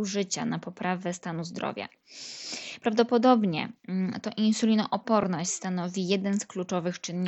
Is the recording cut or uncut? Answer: uncut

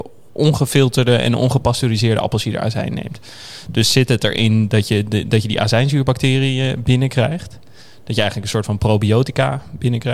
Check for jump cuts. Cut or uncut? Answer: uncut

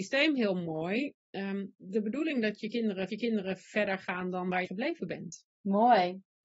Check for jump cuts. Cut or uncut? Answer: cut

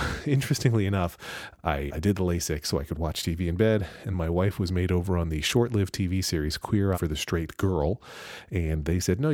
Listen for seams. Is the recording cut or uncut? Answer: cut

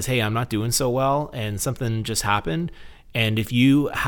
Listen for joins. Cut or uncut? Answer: uncut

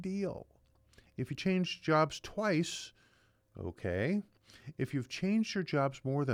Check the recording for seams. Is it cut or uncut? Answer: uncut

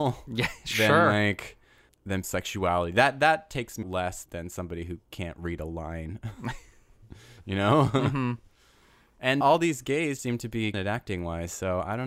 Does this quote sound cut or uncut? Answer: cut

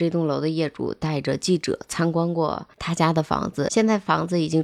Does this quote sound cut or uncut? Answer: cut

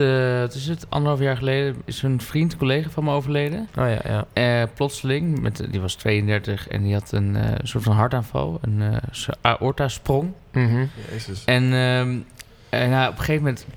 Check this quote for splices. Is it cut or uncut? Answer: uncut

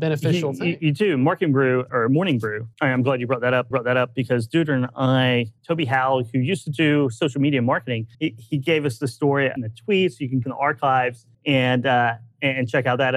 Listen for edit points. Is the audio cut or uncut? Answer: cut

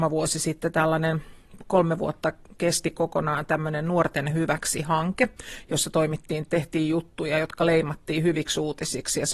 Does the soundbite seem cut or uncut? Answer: uncut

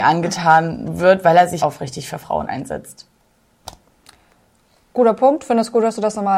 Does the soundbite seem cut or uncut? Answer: cut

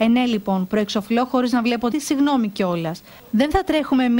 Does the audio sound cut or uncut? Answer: cut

